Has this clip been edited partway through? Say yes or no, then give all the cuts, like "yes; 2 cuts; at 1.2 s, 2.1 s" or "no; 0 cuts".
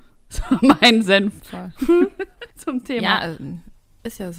yes; 1 cut; at 2.5 s